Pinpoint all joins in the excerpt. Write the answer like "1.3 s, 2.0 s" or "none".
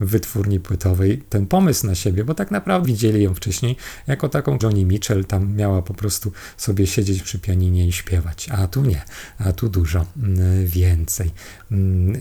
2.8 s, 4.6 s